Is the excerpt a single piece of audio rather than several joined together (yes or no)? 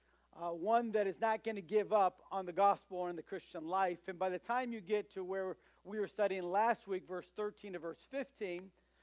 yes